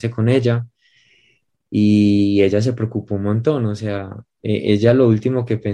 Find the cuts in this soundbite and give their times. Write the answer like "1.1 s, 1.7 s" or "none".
none